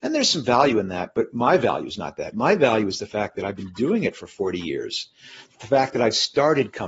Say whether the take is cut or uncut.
uncut